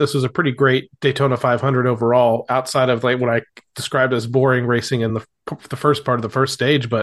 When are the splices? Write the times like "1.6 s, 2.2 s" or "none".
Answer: none

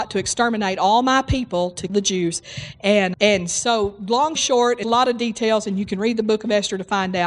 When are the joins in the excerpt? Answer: 1.9 s, 3.1 s, 4.4 s, 4.8 s

